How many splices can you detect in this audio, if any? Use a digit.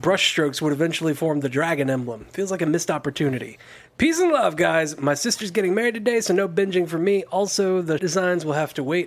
1